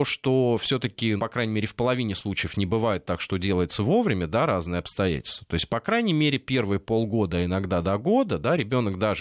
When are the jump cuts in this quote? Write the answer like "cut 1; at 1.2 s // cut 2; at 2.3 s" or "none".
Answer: cut 1; at 1.2 s

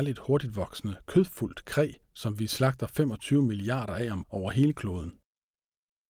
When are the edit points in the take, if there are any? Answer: cut 1; at 2.0 s // cut 2; at 4.2 s

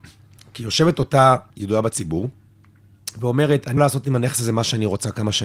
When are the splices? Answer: cut 1; at 1.5 s // cut 2; at 3.8 s

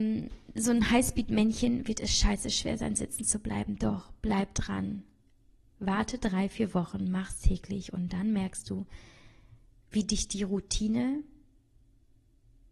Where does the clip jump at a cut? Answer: none

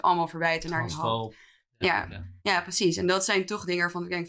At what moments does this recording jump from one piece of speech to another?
cut 1; at 2.4 s

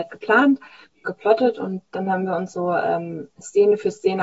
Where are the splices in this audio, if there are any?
cut 1; at 1.0 s // cut 2; at 3.3 s

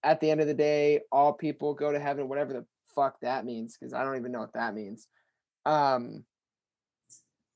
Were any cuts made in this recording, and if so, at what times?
none

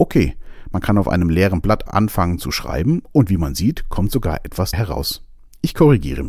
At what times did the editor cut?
cut 1; at 1.9 s // cut 2; at 4.7 s

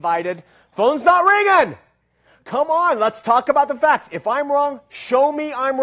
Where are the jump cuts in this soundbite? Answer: none

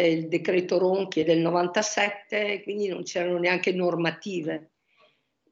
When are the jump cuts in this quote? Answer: none

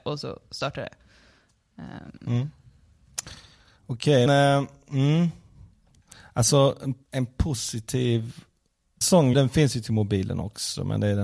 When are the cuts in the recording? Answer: cut 1; at 4.3 s // cut 2; at 7.0 s // cut 3; at 9.0 s // cut 4; at 9.3 s

